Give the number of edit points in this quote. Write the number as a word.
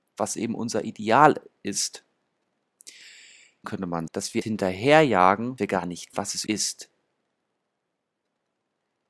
six